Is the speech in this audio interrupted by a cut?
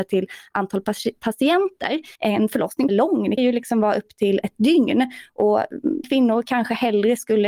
yes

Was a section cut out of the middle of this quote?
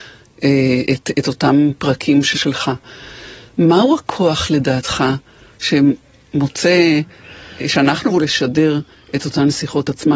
yes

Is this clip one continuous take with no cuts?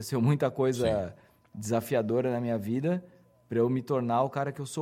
yes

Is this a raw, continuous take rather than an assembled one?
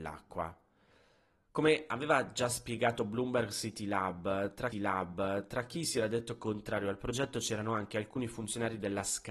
no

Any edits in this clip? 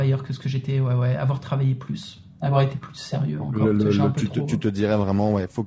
no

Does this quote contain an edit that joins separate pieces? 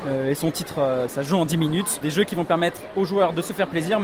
yes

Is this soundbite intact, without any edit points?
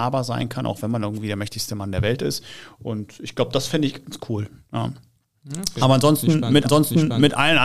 no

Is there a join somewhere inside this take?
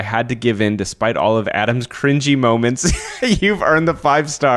no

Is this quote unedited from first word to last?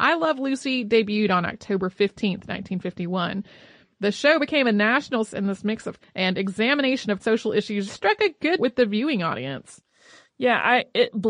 no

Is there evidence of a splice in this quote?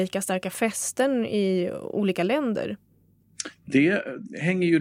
no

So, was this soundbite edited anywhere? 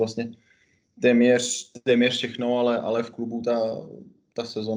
no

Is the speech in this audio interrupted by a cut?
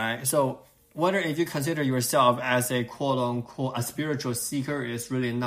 no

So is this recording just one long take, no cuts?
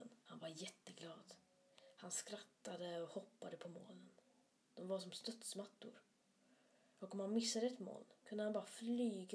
yes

